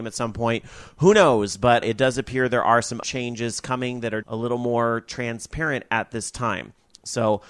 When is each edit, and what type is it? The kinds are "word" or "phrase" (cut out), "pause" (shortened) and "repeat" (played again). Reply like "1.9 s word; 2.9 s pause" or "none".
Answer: 1.8 s word; 3.0 s word; 4.2 s word